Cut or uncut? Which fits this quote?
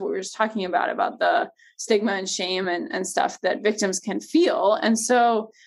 uncut